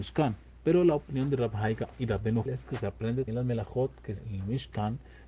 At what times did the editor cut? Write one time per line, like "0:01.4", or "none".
0:01.9
0:02.5
0:03.3
0:04.2